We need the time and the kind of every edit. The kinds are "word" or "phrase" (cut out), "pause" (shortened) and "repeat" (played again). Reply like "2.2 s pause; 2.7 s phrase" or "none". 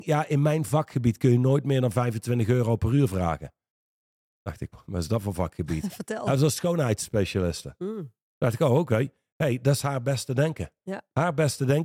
4.7 s word